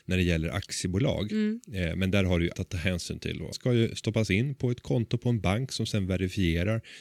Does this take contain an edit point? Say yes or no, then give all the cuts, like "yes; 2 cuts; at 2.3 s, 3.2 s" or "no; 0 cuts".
yes; 2 cuts; at 2.5 s, 3.5 s